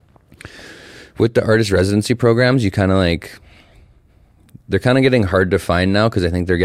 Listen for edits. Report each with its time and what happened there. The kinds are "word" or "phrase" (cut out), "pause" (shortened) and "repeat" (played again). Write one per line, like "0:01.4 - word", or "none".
none

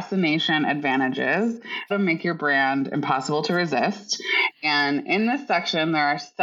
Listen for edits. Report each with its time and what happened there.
0:01.9 - word

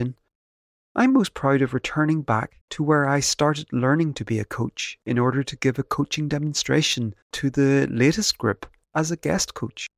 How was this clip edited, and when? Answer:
0:02.6 - pause
0:07.2 - pause

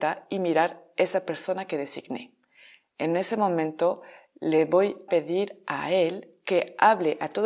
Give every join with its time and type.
0:05.1 - word

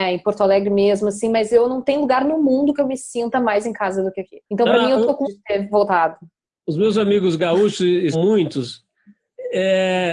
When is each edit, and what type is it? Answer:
0:04.4 - pause
0:05.2 - word
0:08.1 - word

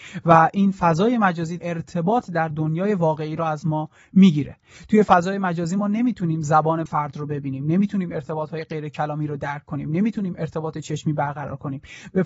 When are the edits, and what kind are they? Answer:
0:01.6 - word
0:06.9 - word

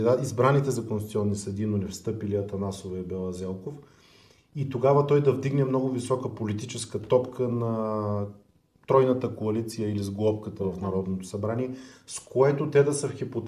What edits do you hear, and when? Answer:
none

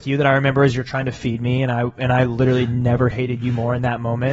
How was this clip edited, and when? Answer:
none

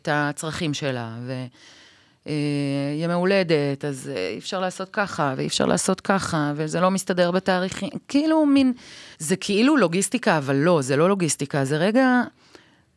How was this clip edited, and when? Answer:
0:09.1 - pause

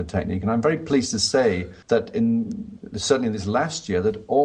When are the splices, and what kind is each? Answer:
0:01.8 - pause

